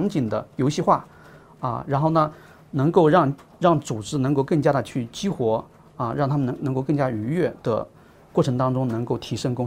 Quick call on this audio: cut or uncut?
uncut